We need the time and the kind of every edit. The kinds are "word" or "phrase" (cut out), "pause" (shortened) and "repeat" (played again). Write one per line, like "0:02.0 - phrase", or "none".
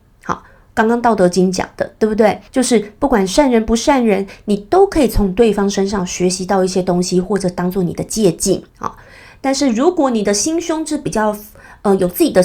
0:02.5 - pause
0:08.7 - pause

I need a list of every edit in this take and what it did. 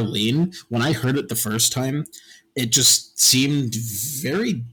none

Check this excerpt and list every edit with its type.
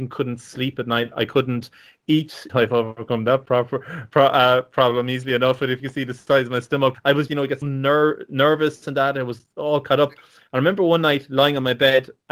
0:02.5 - word
0:06.9 - word
0:07.3 - word
0:07.6 - word

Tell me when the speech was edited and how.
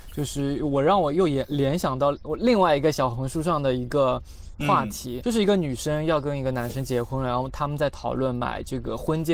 0:05.2 - word

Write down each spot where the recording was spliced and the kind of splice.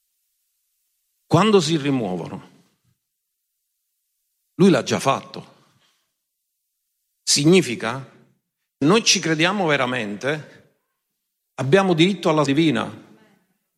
0:08.8 - word
0:12.5 - word

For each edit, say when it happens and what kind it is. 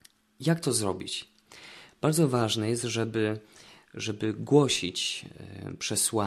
none

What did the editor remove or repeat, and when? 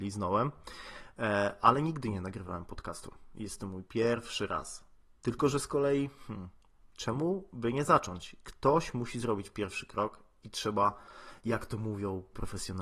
none

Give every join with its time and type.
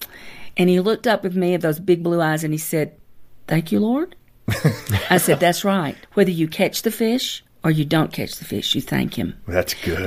0:04.2 - pause
0:06.0 - pause
0:07.5 - pause

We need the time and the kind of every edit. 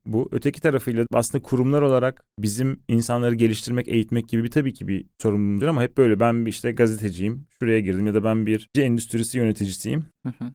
0:01.1 - word
0:05.6 - word
0:08.7 - word

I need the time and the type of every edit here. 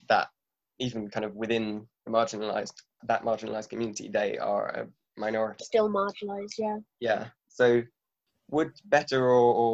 0:02.0 - pause
0:03.0 - word
0:05.6 - word
0:07.4 - pause

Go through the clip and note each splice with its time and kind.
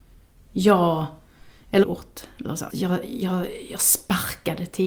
0:01.8 - word
0:02.7 - word

